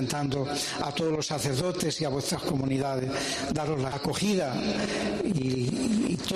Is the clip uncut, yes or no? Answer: no